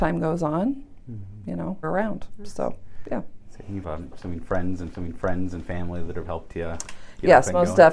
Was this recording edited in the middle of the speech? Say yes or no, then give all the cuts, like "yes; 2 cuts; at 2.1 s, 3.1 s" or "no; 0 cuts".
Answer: yes; 4 cuts; at 1.8 s, 3.8 s, 4.9 s, 6.2 s